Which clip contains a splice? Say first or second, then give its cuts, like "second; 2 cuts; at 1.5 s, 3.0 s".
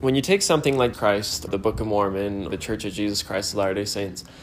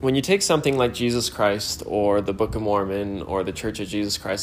first; 3 cuts; at 0.9 s, 1.5 s, 2.5 s